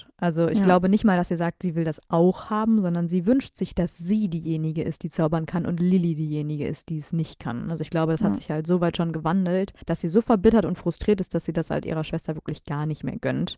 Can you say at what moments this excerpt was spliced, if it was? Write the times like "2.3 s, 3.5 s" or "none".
9.8 s